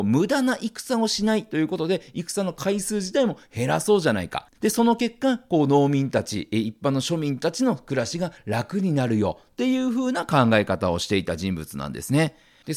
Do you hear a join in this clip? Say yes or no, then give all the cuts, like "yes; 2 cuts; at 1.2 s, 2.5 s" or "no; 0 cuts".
yes; 1 cut; at 4.5 s